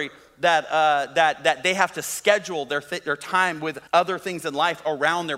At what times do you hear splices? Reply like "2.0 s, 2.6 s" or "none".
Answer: 3.9 s